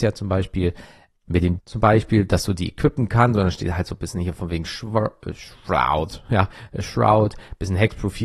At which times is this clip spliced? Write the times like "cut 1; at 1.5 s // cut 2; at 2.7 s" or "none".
cut 1; at 1.1 s // cut 2; at 1.6 s